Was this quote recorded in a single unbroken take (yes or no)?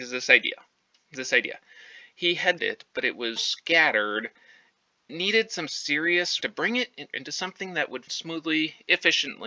no